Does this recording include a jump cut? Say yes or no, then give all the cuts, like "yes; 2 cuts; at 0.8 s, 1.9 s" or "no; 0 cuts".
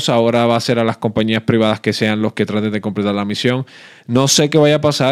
no; 0 cuts